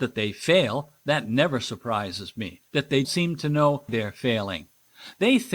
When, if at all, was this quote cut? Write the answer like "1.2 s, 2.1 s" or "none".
2.7 s, 3.0 s, 3.9 s